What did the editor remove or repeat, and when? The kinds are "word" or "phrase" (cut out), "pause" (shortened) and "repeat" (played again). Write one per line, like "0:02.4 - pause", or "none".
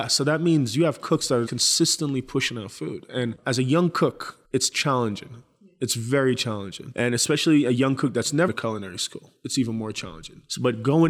0:01.5 - word
0:04.4 - pause
0:08.5 - word